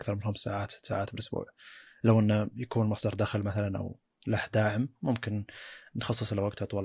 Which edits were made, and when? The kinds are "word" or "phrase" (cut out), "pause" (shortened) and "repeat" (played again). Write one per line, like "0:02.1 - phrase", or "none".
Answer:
none